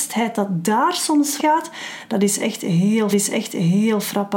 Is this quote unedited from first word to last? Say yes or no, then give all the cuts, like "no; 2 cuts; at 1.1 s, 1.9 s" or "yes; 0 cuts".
no; 2 cuts; at 1.4 s, 3.1 s